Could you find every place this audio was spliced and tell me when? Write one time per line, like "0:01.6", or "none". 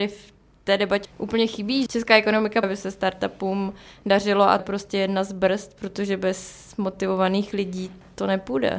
0:01.0
0:02.6
0:04.6